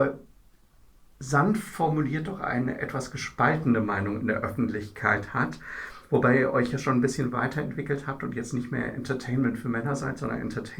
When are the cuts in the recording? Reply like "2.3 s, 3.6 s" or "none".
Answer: none

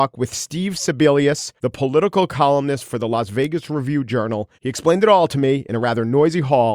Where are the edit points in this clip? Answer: 1.6 s, 4.5 s

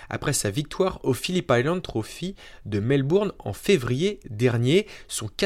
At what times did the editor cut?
none

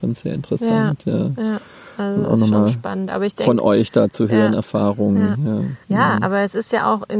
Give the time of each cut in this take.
5.8 s

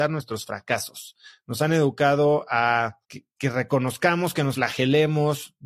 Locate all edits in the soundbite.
3.0 s, 4.5 s

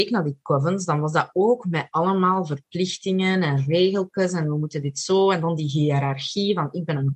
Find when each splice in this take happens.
none

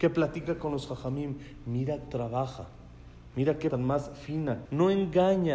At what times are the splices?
2.1 s, 3.7 s, 4.6 s

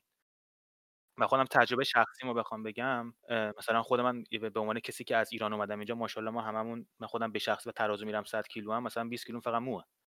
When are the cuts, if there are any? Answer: 3.2 s, 6.9 s

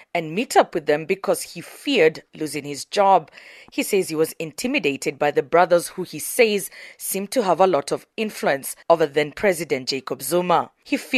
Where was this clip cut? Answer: 8.8 s

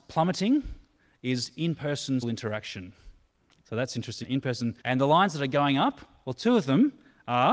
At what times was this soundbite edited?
2.2 s, 3.4 s, 4.2 s, 4.8 s

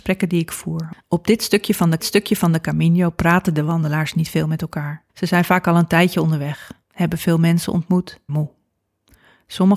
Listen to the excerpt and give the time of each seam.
2.0 s, 5.1 s, 8.3 s

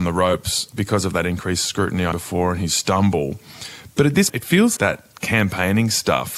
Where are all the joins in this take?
2.1 s, 4.3 s, 4.8 s

